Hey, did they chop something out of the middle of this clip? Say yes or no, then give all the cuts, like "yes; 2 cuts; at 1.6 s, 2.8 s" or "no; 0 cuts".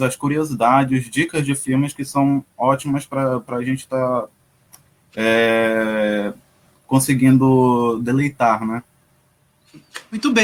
no; 0 cuts